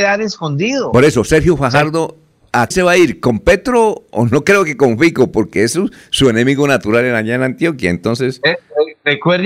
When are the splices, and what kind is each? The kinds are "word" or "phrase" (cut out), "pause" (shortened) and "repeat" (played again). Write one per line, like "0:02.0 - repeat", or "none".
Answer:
0:02.7 - phrase